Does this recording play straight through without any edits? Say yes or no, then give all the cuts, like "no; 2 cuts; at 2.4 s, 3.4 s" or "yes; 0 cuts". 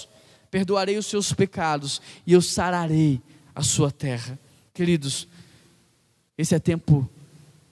yes; 0 cuts